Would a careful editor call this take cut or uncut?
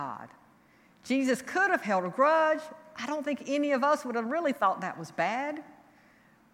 uncut